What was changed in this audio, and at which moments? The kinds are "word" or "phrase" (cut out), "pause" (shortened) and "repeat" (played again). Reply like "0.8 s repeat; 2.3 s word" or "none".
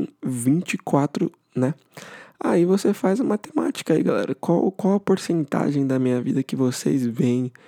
1.4 s word